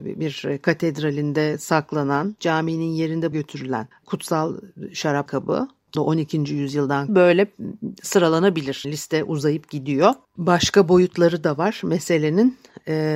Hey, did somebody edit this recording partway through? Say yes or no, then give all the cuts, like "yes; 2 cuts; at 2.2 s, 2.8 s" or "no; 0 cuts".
yes; 8 cuts; at 2.4 s, 3.3 s, 3.9 s, 5.3 s, 5.9 s, 7.1 s, 8.8 s, 10.2 s